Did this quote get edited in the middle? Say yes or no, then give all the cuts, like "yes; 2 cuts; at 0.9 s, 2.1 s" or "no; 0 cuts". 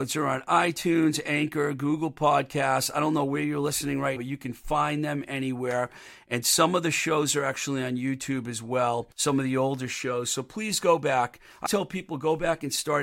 yes; 3 cuts; at 4.2 s, 9.1 s, 11.7 s